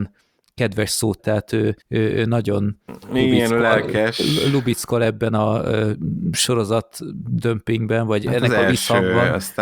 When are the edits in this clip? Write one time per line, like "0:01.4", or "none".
0:01.2
0:01.8
0:08.2